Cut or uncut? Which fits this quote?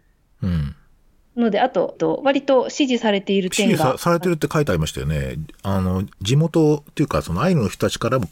cut